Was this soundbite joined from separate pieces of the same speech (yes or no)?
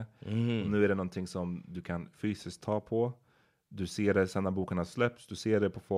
no